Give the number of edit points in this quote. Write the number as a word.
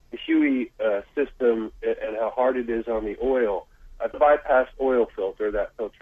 one